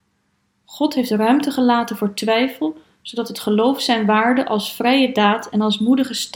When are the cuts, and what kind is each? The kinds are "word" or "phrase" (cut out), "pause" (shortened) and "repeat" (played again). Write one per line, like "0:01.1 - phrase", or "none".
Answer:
none